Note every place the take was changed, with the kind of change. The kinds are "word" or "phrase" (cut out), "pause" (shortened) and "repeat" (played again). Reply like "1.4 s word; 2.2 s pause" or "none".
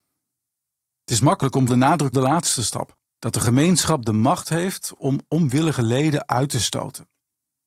1.7 s word; 2.1 s phrase; 3.1 s pause